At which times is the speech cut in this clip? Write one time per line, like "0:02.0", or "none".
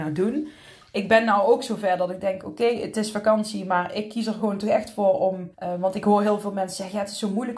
0:05.5